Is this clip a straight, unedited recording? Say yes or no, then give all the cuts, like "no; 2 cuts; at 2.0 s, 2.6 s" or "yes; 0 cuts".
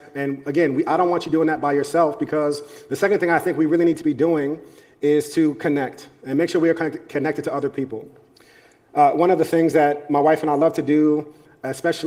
yes; 0 cuts